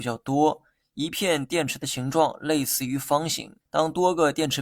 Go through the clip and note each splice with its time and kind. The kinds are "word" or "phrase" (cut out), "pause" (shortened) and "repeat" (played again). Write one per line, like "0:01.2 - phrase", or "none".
0:03.6 - pause